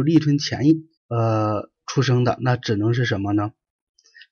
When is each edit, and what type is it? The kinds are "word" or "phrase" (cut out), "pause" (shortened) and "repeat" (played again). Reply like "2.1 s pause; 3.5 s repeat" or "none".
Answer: 1.0 s pause; 2.4 s phrase